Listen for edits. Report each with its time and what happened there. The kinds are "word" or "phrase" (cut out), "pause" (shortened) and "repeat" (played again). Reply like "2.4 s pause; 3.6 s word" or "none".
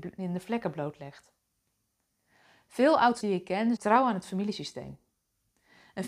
3.2 s word; 3.8 s word